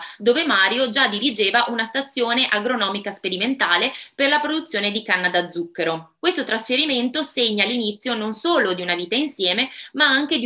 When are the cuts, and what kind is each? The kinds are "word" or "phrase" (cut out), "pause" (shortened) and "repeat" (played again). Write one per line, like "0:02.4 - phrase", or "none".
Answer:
0:06.2 - pause